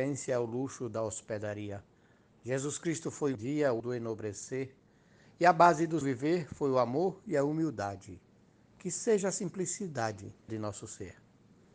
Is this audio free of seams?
no; 4 cuts; at 3.3 s, 3.8 s, 6.0 s, 10.5 s

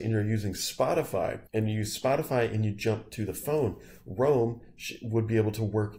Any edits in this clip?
yes; 1 cut; at 1.5 s

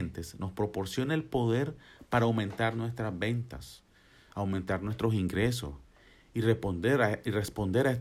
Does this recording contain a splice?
no; 0 cuts

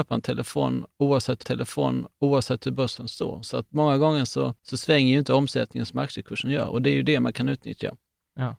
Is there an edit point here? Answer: yes; 2 cuts; at 1.4 s, 4.6 s

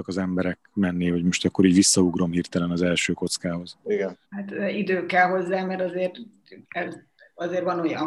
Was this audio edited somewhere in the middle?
yes; 2 cuts; at 4.2 s, 6.6 s

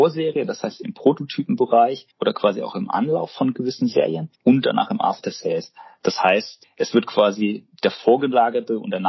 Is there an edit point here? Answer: yes; 3 cuts; at 2.1 s, 4.3 s, 6.6 s

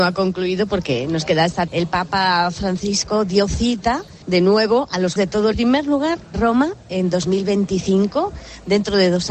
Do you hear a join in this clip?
yes; 5 cuts; at 1.7 s, 4.2 s, 5.2 s, 5.5 s, 6.3 s

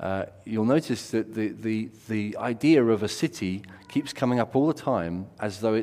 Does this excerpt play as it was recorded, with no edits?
yes; 0 cuts

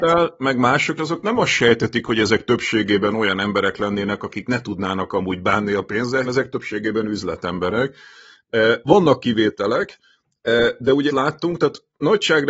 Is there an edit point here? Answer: yes; 3 cuts; at 1.0 s, 6.2 s, 11.1 s

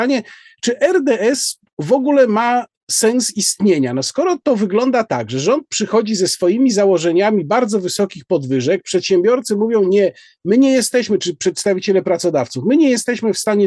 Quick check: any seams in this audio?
no; 0 cuts

